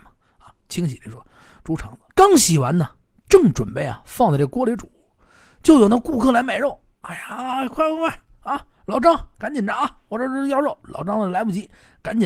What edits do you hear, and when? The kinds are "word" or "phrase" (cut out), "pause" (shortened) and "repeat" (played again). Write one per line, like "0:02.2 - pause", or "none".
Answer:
0:02.1 - pause